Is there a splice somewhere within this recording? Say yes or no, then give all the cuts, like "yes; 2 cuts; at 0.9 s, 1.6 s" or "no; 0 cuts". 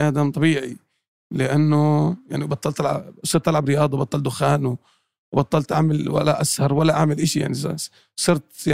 no; 0 cuts